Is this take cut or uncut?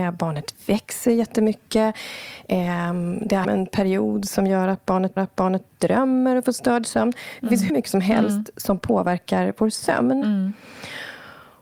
cut